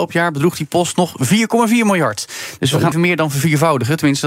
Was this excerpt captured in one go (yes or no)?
no